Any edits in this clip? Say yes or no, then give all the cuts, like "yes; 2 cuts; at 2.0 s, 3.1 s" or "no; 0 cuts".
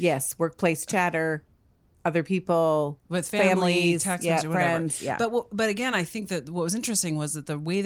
no; 0 cuts